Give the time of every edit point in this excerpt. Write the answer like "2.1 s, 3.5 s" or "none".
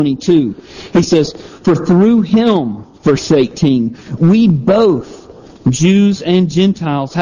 none